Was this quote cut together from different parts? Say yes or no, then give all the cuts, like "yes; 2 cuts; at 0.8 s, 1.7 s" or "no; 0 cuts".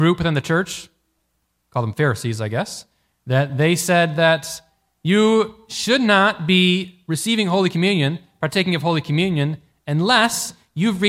no; 0 cuts